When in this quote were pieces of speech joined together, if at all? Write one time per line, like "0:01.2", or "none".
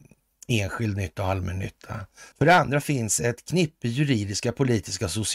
0:02.3